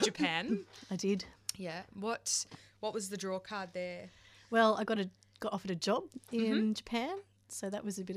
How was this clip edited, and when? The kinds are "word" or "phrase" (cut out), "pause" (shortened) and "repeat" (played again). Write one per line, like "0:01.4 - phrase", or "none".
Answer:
none